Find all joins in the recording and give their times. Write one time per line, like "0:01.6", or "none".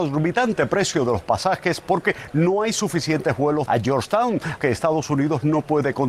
0:03.7
0:04.6